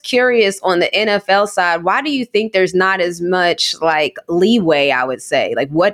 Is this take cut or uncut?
uncut